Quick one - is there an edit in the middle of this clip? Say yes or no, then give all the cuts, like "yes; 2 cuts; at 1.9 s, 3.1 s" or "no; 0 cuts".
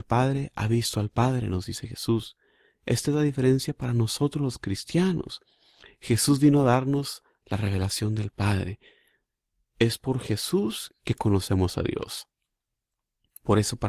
no; 0 cuts